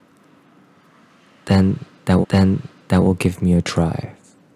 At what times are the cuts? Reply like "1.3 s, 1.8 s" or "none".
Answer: 2.2 s